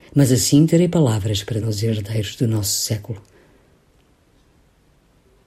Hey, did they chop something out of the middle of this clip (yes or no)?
yes